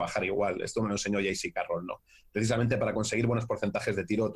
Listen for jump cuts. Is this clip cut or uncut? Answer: uncut